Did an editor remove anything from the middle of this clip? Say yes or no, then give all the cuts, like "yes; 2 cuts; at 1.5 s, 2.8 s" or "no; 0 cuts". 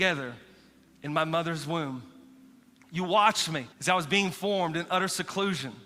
yes; 1 cut; at 3.7 s